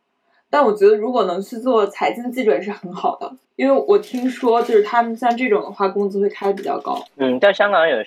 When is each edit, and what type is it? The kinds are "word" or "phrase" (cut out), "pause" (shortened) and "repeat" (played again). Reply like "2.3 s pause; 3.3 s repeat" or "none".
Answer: 3.4 s pause; 7.1 s pause